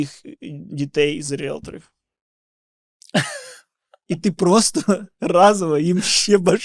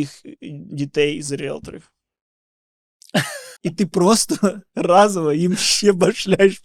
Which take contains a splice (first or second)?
second